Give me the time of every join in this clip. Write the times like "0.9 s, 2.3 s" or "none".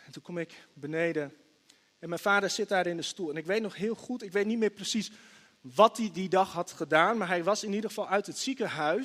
none